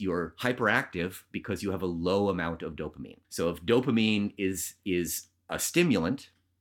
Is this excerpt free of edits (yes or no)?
no